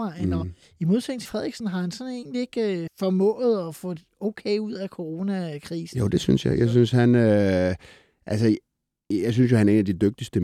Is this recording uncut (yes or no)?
no